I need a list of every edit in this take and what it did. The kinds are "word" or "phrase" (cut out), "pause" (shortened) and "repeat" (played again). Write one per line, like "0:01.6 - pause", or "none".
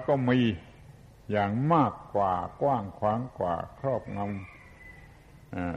none